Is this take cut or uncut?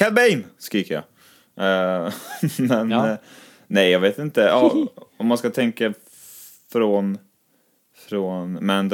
uncut